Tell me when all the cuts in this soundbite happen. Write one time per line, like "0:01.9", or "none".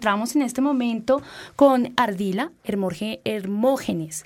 0:02.0